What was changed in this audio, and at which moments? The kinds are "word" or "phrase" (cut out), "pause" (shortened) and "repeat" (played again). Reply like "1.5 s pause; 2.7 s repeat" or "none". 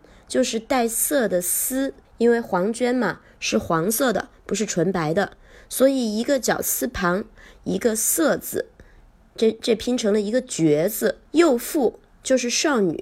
2.0 s pause; 11.3 s pause

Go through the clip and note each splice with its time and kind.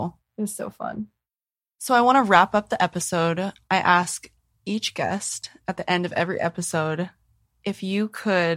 none

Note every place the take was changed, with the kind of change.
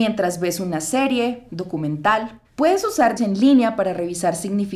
1.5 s word; 2.4 s pause; 3.2 s word

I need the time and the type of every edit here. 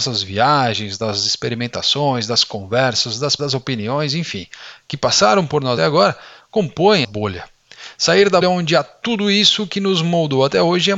3.4 s word; 5.8 s word; 7.0 s word; 8.4 s word

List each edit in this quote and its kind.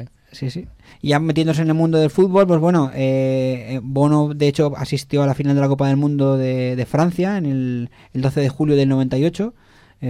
0.9 s pause

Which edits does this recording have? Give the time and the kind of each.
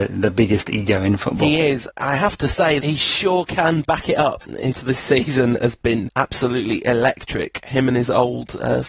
2.8 s word; 4.7 s word

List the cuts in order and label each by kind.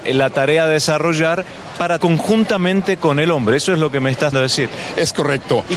2.0 s word; 4.3 s word

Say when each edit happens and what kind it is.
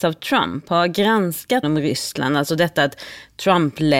1.6 s phrase

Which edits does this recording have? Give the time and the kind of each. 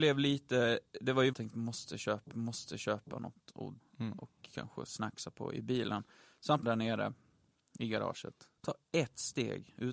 1.3 s phrase; 2.3 s repeat; 3.8 s word; 6.6 s word; 8.6 s pause

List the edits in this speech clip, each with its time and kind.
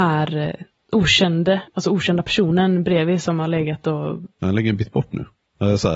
1.7 s pause

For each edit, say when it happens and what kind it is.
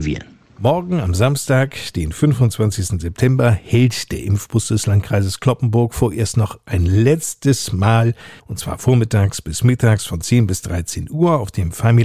8.4 s pause

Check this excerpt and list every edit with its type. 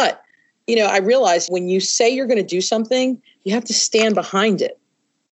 none

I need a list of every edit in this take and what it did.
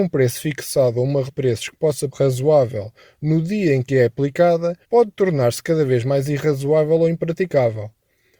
1.3 s word; 2.1 s phrase; 4.8 s pause

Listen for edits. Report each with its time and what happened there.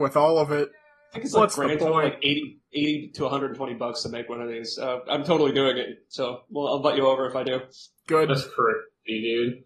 none

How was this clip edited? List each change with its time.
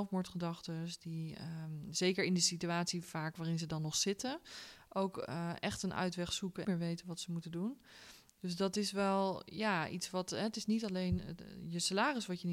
6.6 s phrase

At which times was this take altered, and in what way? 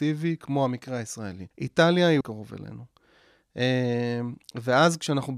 1.5 s pause; 2.2 s phrase

